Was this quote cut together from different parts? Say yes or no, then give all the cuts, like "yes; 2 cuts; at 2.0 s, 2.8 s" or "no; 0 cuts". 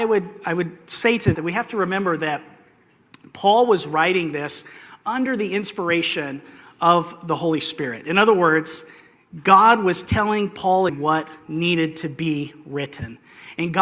yes; 2 cuts; at 1.3 s, 10.9 s